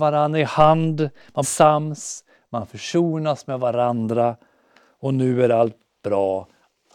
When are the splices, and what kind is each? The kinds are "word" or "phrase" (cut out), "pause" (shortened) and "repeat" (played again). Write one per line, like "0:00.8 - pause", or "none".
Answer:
0:01.4 - word